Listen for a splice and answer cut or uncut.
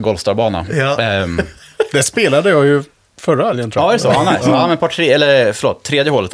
uncut